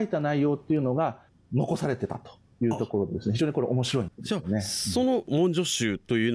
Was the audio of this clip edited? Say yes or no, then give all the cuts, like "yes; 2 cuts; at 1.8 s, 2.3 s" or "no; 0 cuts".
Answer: yes; 1 cut; at 4.1 s